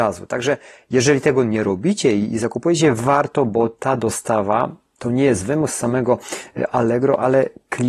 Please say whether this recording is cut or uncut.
uncut